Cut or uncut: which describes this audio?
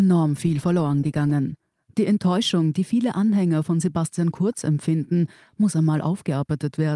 uncut